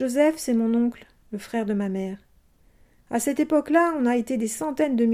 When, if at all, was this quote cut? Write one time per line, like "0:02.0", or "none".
none